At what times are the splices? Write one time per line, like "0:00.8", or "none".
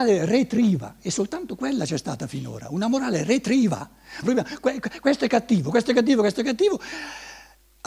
0:04.2